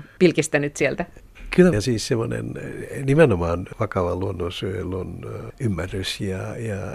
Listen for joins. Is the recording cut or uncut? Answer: cut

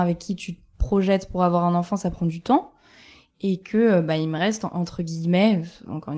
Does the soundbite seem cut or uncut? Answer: uncut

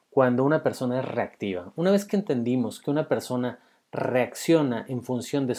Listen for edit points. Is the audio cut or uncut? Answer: uncut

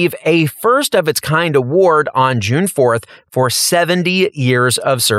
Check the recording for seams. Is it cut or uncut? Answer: uncut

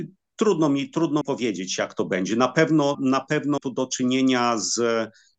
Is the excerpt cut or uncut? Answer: cut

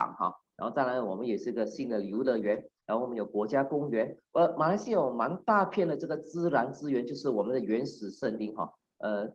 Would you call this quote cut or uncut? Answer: cut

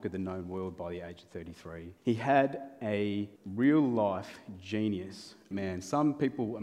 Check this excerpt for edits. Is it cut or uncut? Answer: cut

